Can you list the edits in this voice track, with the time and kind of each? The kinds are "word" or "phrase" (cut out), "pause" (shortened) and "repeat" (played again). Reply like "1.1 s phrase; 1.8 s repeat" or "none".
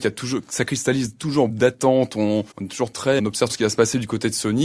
1.5 s word; 2.5 s pause; 3.2 s word; 3.5 s word

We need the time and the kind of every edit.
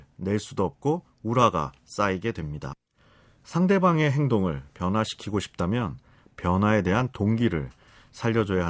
none

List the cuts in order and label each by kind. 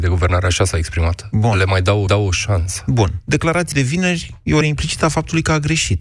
2.1 s repeat; 3.7 s word; 4.6 s word

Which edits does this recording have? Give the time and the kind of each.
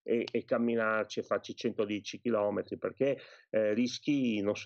none

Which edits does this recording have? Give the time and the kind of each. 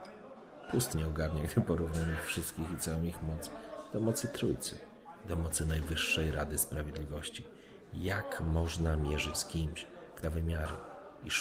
0.9 s word; 9.3 s word; 10.2 s word

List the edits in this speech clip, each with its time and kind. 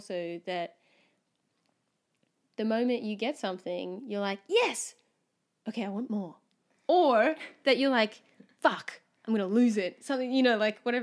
none

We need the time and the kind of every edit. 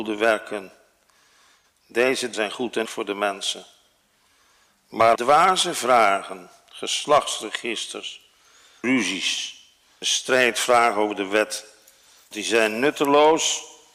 2.3 s word; 2.8 s word; 5.1 s word; 8.8 s word; 10.0 s word; 12.3 s word

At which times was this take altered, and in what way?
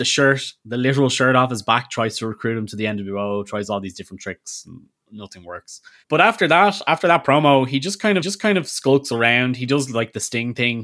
8.2 s repeat

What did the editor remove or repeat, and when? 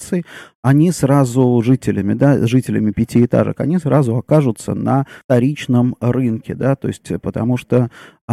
5.2 s pause

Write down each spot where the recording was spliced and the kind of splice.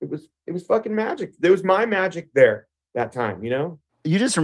none

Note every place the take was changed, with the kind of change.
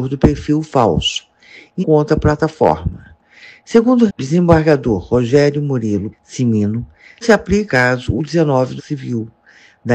1.8 s word; 4.1 s word; 6.1 s word; 7.2 s word; 7.7 s word; 8.2 s word; 8.8 s word

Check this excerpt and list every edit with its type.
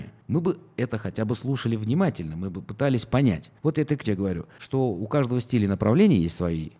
4.0 s word

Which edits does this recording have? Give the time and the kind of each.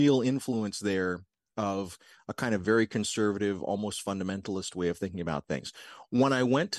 none

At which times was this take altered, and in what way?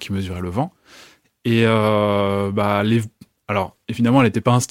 none

